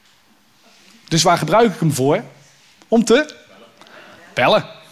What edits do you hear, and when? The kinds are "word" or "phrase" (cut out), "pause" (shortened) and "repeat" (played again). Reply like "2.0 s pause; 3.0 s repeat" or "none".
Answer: none

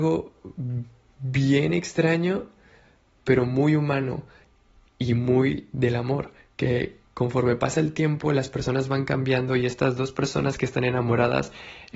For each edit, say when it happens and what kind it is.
none

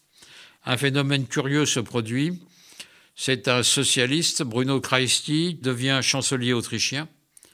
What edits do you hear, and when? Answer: 5.6 s word

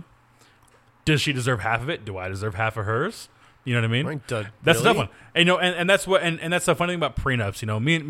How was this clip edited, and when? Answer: none

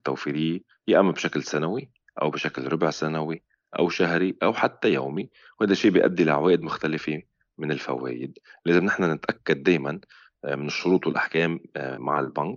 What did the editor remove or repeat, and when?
none

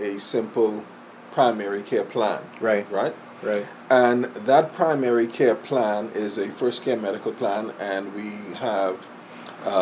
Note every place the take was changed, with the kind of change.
none

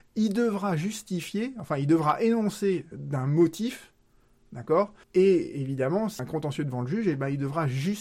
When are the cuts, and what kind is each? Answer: 2.9 s word; 5.0 s pause; 6.2 s phrase

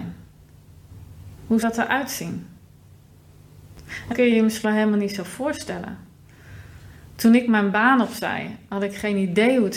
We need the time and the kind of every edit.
1.6 s word; 4.1 s word; 4.6 s word

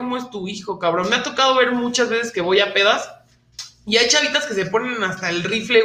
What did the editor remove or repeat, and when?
none

